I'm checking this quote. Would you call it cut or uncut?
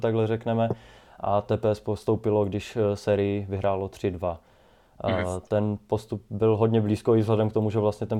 uncut